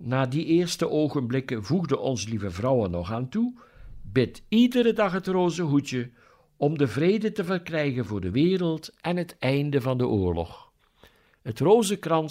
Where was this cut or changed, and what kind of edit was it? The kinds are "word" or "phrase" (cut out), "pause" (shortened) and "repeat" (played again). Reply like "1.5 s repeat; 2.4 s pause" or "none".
none